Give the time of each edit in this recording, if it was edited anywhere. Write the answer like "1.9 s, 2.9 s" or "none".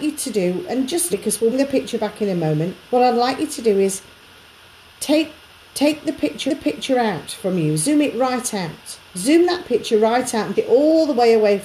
1.1 s, 1.5 s, 2.9 s, 5.6 s, 6.5 s, 9.1 s, 10.5 s